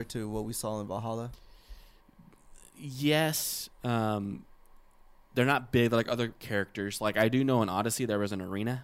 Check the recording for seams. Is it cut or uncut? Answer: uncut